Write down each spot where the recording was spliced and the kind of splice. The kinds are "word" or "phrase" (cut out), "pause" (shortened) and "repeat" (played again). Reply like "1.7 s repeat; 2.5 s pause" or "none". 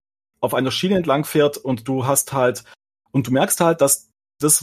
none